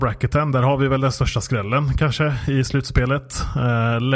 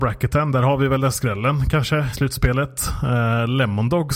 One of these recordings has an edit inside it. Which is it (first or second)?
second